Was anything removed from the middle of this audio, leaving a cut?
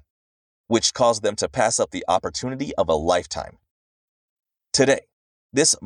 no; 0 cuts

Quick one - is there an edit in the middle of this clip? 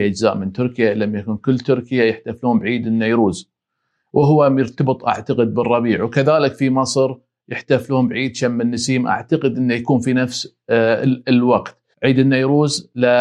yes; 1 cut; at 11.9 s

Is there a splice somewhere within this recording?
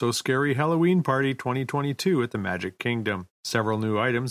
no; 0 cuts

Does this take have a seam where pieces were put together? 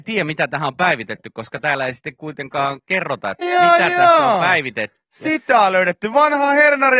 yes; 1 cut; at 3.4 s

